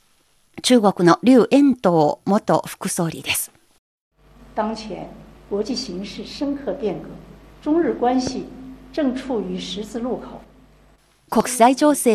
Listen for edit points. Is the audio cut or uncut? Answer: uncut